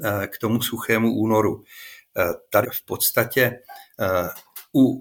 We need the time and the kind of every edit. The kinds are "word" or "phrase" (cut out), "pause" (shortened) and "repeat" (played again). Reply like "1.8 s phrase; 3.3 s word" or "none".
2.6 s phrase

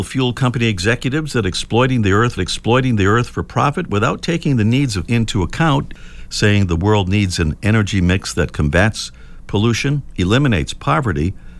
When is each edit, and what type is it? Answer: 2.4 s repeat; 5.1 s word

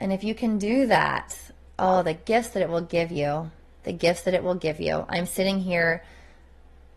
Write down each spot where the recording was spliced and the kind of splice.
none

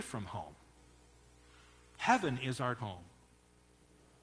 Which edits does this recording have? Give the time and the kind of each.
2.8 s word

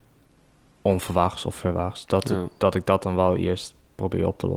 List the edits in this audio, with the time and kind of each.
none

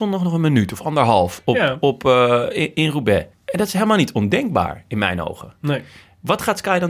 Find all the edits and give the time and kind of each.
3.3 s pause

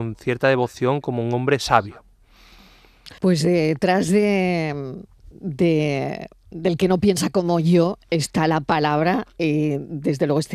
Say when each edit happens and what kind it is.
3.2 s pause

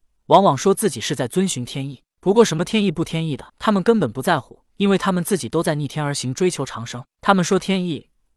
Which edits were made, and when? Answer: 3.5 s pause; 4.7 s pause

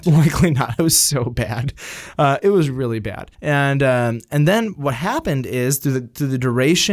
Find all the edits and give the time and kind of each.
3.3 s pause

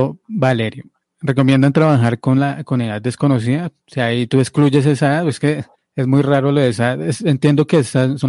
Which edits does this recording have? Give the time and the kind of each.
5.7 s pause

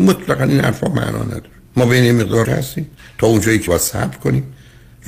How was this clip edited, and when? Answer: 1.7 s pause; 2.4 s word; 3.7 s word

